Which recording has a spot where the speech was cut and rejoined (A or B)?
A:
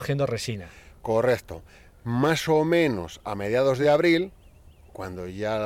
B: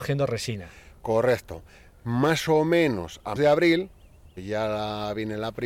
B